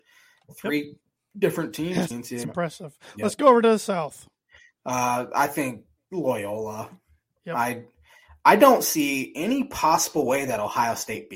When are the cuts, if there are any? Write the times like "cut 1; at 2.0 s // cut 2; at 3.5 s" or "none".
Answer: cut 1; at 2.1 s // cut 2; at 2.4 s